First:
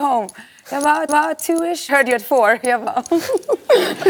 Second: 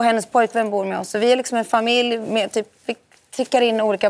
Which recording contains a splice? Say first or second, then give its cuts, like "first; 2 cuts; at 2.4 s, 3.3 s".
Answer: first; 2 cuts; at 1.1 s, 1.9 s